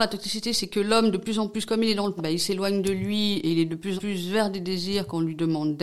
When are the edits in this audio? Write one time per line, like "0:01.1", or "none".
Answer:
0:02.2
0:04.0